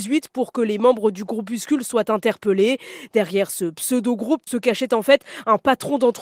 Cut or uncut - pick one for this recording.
cut